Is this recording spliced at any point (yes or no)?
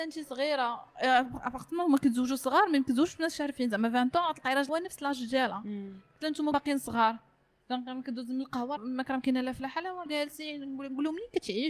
yes